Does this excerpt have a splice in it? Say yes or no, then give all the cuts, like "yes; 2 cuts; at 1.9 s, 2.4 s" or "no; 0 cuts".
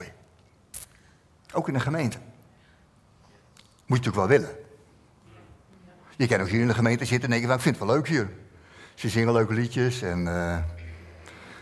no; 0 cuts